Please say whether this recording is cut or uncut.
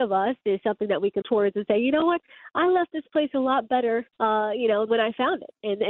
cut